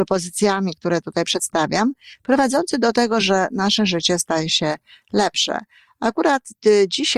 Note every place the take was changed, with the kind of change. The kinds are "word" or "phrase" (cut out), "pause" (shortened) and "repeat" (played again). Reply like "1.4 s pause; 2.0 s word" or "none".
none